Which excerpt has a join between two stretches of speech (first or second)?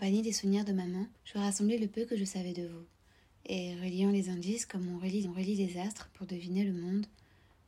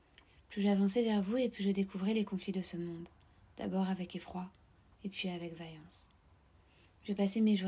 first